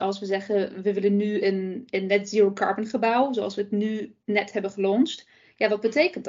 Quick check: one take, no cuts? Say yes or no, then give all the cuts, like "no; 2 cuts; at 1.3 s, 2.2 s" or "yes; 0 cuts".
yes; 0 cuts